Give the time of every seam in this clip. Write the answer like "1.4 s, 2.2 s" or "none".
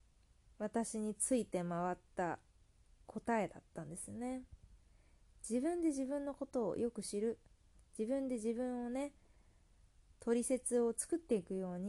2.7 s